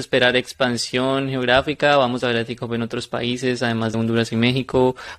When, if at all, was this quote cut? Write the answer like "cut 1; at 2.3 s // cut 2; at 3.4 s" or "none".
cut 1; at 3.9 s